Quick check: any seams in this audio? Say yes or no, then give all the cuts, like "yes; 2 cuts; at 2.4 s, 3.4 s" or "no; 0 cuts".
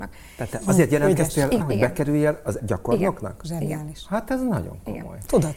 yes; 2 cuts; at 1.6 s, 2.6 s